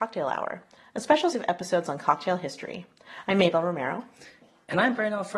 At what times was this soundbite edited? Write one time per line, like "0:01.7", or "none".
0:01.3